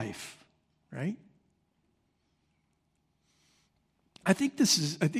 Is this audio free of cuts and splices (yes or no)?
yes